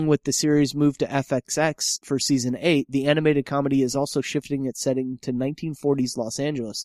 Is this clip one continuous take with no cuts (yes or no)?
yes